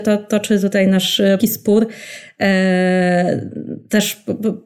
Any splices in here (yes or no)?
yes